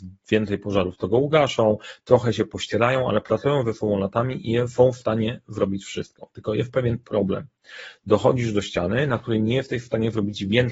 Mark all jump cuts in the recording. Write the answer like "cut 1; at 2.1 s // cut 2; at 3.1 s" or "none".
none